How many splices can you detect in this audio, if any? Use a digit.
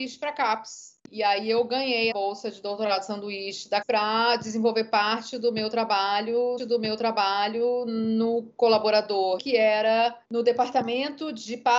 6